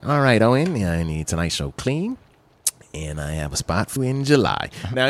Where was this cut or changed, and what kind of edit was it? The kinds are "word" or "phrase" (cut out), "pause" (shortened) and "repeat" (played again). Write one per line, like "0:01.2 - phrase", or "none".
0:01.2 - phrase
0:04.0 - word